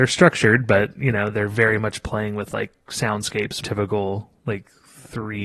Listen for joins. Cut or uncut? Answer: cut